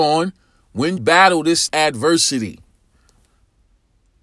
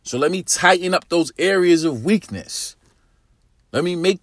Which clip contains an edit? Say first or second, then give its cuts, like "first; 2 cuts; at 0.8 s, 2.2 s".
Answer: first; 2 cuts; at 1.0 s, 1.7 s